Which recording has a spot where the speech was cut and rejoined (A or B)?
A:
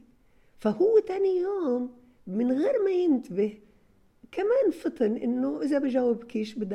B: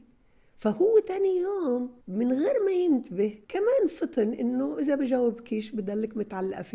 B